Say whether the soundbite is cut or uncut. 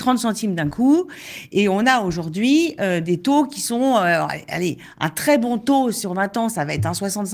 uncut